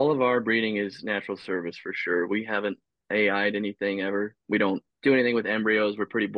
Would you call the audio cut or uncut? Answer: uncut